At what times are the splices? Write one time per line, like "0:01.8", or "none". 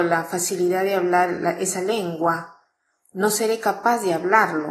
none